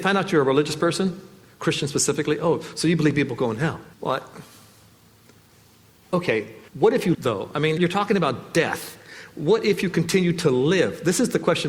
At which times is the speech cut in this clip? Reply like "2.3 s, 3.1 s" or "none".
3.9 s, 6.7 s, 7.1 s, 7.8 s